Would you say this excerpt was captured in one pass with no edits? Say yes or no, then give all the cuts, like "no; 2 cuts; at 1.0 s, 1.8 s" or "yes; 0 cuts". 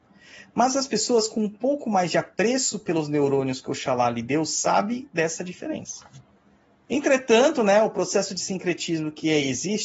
yes; 0 cuts